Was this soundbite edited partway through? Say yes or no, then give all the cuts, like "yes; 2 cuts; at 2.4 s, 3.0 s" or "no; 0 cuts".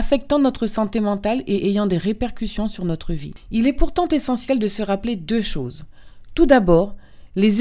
no; 0 cuts